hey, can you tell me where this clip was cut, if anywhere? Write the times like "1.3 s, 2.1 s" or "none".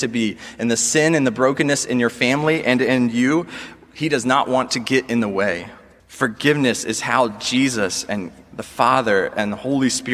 6.0 s